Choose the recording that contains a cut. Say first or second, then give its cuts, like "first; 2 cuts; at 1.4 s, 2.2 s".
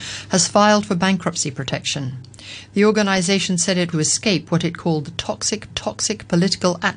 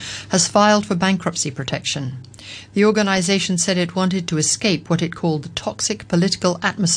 first; 2 cuts; at 3.9 s, 5.7 s